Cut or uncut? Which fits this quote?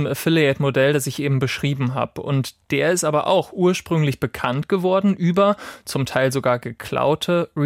uncut